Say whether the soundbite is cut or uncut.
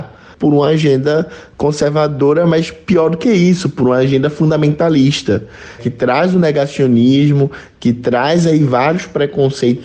cut